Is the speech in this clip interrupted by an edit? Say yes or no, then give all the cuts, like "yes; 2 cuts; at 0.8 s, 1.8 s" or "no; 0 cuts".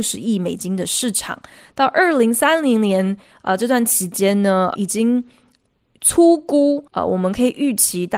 yes; 2 cuts; at 4.8 s, 6.9 s